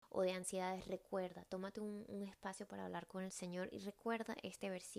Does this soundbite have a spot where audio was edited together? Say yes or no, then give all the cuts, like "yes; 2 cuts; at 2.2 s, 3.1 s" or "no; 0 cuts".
no; 0 cuts